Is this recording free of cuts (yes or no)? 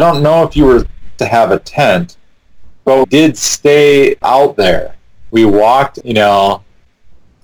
no